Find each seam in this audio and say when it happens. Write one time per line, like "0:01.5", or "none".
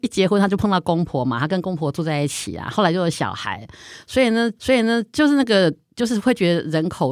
0:04.6